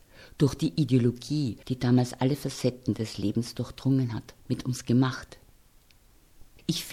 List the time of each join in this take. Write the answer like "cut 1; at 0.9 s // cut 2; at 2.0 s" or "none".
cut 1; at 1.6 s // cut 2; at 4.4 s